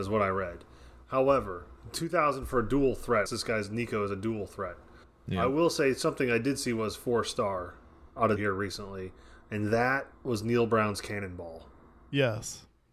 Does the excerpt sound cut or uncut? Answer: cut